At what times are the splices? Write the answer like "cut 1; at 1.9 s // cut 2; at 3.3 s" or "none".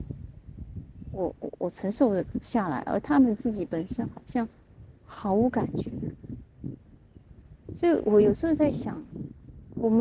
cut 1; at 5.0 s